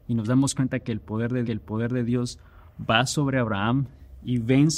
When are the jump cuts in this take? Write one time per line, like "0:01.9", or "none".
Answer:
0:01.5

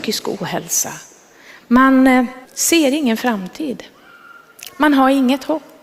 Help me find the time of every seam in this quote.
0:02.4

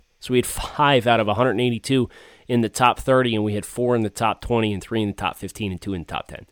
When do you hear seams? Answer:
none

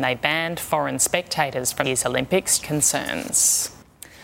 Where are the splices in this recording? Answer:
0:01.8
0:02.6

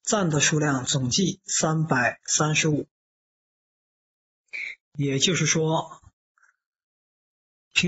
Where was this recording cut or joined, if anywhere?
none

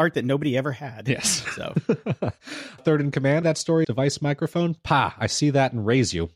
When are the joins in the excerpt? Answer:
0:02.8
0:03.4
0:03.8

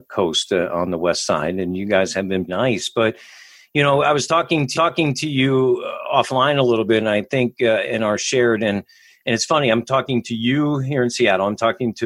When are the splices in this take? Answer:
0:02.5
0:04.7

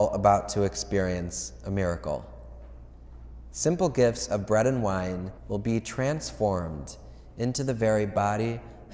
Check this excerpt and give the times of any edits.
0:05.4

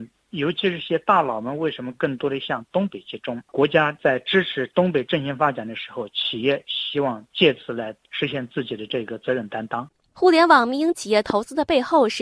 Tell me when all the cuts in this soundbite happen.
none

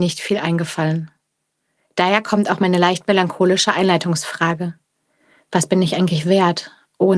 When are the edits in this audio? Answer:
none

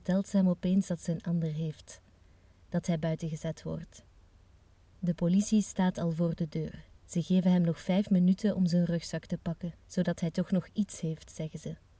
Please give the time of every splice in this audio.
0:07.0
0:09.8

